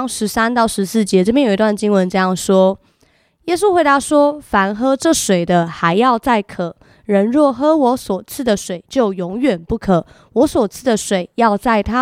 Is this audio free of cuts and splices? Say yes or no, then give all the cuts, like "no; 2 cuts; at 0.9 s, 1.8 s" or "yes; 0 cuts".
yes; 0 cuts